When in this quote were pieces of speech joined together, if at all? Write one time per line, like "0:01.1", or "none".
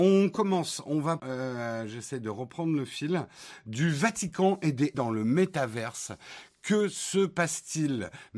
0:01.2
0:04.9